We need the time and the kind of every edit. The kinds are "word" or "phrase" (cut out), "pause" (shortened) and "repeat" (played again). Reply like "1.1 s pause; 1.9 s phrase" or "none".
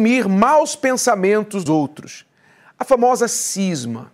1.7 s word